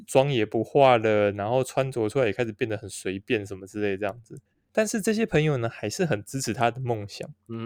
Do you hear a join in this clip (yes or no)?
yes